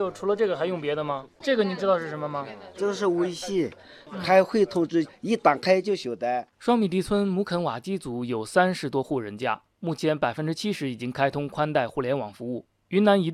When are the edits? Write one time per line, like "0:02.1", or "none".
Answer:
none